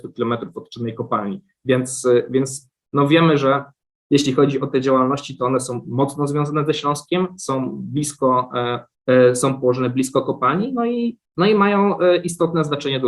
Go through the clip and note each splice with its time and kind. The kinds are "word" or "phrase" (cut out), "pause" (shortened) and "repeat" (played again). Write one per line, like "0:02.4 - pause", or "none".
0:03.8 - pause
0:08.9 - pause
0:11.2 - pause